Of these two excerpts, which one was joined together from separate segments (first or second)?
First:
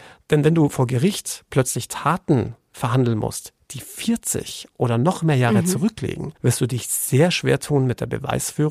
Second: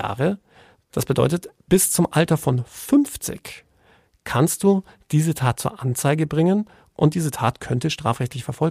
first